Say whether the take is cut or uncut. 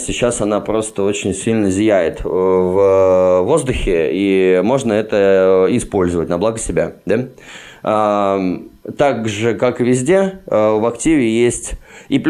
uncut